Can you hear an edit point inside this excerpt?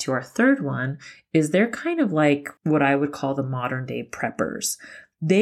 yes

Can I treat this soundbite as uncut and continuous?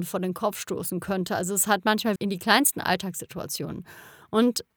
no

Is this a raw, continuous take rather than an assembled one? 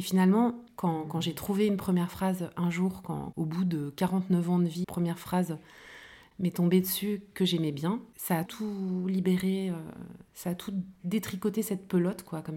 no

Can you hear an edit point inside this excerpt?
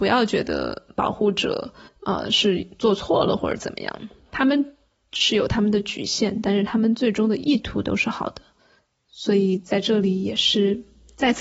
yes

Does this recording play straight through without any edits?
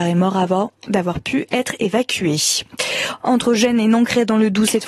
yes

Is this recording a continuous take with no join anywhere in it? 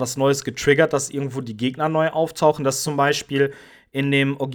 yes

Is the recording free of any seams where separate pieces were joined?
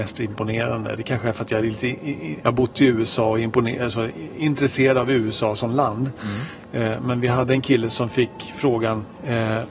yes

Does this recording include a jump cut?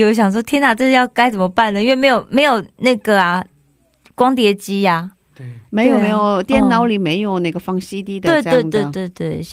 no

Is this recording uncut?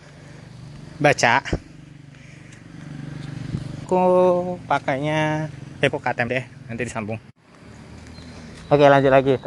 no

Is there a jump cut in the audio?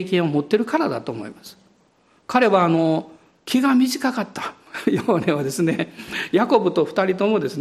no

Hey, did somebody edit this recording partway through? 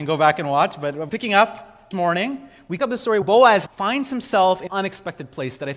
yes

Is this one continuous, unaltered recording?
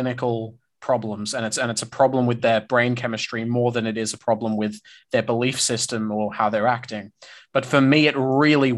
yes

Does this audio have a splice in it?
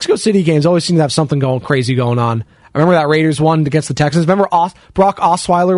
no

